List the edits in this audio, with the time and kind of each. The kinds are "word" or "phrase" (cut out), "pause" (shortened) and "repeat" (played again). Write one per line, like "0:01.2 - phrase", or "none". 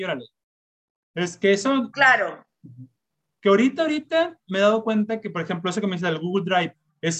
none